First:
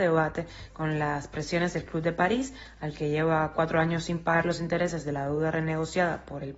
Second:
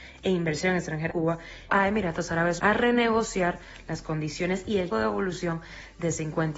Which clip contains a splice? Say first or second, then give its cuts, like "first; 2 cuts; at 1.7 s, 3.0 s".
second; 4 cuts; at 1.1 s, 1.7 s, 2.6 s, 4.9 s